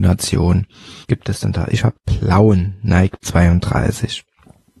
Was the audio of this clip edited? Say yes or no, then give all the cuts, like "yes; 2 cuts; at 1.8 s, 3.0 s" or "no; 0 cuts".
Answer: yes; 3 cuts; at 1.0 s, 2.0 s, 3.2 s